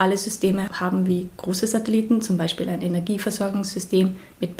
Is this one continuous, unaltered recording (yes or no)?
yes